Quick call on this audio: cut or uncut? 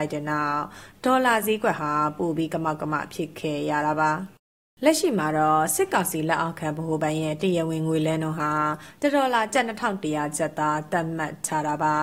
uncut